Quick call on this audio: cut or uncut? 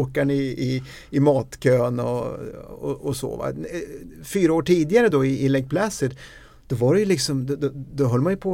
uncut